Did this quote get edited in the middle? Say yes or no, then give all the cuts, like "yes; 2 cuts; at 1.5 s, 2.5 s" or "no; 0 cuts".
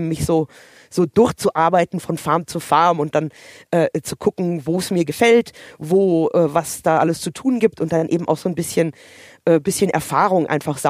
no; 0 cuts